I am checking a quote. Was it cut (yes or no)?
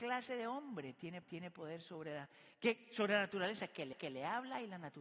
yes